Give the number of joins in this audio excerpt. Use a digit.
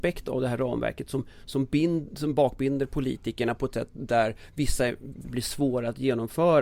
1